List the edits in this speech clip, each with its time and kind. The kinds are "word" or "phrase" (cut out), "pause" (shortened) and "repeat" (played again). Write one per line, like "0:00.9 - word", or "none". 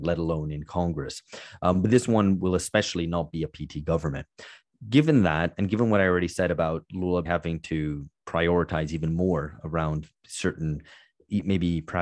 0:07.2 - word